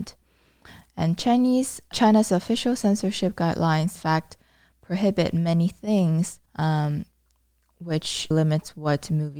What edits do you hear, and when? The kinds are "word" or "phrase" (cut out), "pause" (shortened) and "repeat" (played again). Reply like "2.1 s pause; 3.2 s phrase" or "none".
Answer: 1.9 s word; 4.0 s word; 6.5 s pause; 8.3 s word